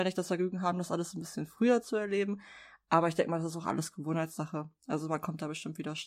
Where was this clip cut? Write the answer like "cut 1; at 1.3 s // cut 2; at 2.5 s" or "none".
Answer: none